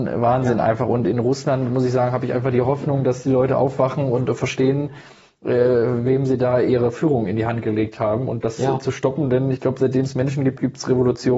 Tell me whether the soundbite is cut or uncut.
uncut